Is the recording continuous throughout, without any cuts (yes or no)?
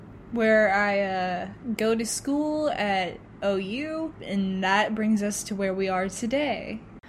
yes